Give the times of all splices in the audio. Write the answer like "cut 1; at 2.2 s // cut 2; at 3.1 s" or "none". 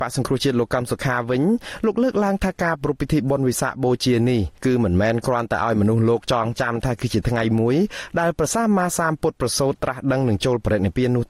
cut 1; at 4.6 s